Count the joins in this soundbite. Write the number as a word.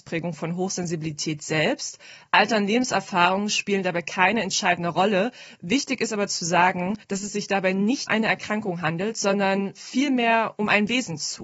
two